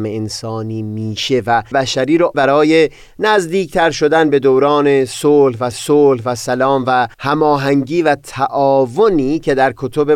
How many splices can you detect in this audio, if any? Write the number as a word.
four